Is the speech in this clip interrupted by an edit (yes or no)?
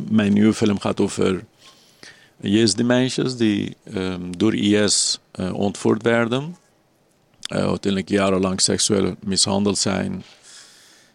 no